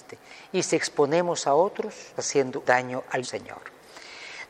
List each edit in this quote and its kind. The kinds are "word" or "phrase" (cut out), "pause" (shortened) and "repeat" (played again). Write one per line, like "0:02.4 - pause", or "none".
0:02.2 - word
0:02.6 - word
0:03.2 - word